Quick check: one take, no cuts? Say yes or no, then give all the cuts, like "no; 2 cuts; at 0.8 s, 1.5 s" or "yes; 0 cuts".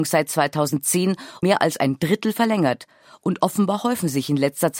no; 1 cut; at 1.4 s